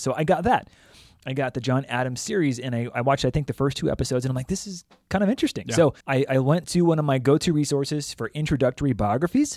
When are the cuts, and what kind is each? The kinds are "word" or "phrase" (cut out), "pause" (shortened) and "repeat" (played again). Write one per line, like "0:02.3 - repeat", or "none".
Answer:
0:06.0 - pause